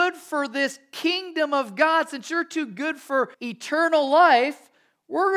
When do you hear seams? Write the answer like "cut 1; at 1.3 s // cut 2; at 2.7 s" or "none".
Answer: cut 1; at 3.3 s